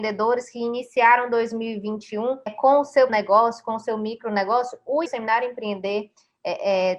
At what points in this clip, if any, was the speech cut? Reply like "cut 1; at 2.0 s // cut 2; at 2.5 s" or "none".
cut 1; at 2.5 s // cut 2; at 3.1 s // cut 3; at 5.1 s